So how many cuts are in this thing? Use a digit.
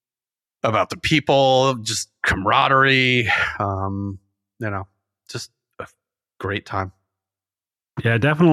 0